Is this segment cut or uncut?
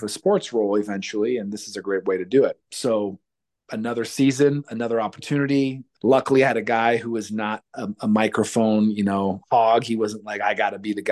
uncut